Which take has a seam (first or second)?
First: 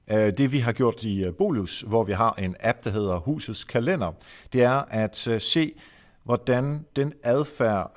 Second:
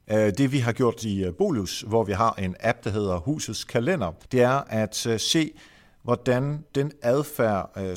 second